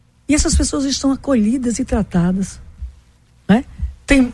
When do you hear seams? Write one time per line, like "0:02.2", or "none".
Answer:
none